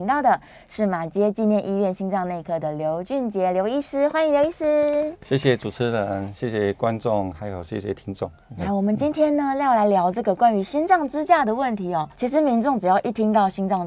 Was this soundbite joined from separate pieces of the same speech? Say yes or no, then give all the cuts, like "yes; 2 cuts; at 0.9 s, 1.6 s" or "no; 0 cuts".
yes; 1 cut; at 12.1 s